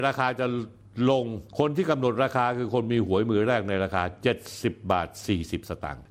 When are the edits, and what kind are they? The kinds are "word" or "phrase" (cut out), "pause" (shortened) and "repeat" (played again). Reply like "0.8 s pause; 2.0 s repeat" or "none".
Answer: 1.5 s pause